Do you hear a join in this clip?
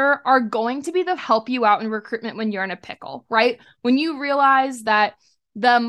yes; 1 cut; at 1.2 s

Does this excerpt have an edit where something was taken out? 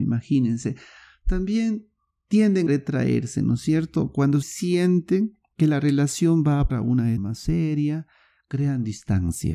yes; 4 cuts; at 2.7 s, 4.4 s, 6.7 s, 7.2 s

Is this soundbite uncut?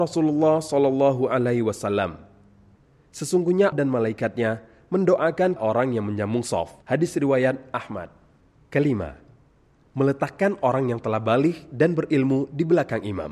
no; 3 cuts; at 3.7 s, 5.6 s, 6.8 s

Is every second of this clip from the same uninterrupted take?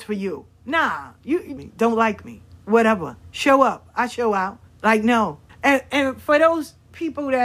no; 3 cuts; at 1.6 s, 4.7 s, 5.5 s

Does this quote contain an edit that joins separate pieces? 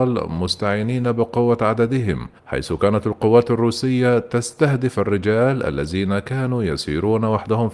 yes; 1 cut; at 2.4 s

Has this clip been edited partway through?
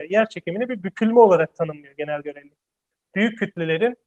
no; 0 cuts

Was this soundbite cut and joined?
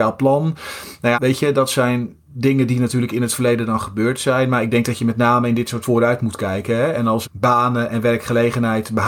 yes; 3 cuts; at 1.1 s, 5.8 s, 7.2 s

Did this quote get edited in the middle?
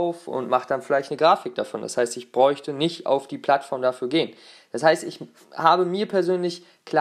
no; 0 cuts

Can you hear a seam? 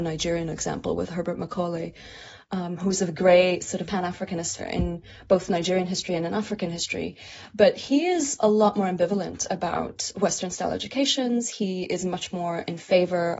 yes; 2 cuts; at 3.9 s, 4.6 s

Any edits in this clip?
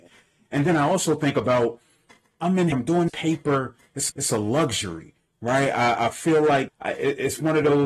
yes; 5 cuts; at 2.3 s, 2.7 s, 3.1 s, 4.1 s, 6.7 s

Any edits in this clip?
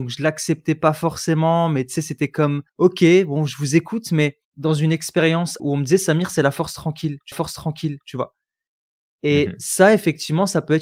yes; 4 cuts; at 2.7 s, 4.4 s, 5.6 s, 7.3 s

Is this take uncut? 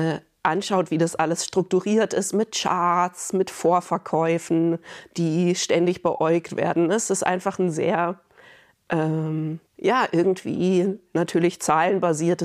no; 1 cut; at 9.7 s

